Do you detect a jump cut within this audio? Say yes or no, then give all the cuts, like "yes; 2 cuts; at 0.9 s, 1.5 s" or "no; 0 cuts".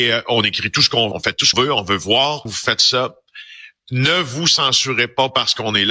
yes; 3 cuts; at 1.1 s, 1.5 s, 2.5 s